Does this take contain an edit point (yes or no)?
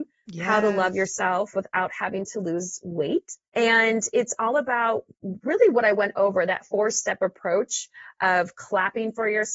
yes